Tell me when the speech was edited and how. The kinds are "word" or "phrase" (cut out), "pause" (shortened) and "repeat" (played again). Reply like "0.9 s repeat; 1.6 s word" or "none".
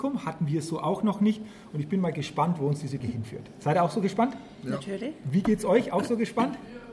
3.0 s word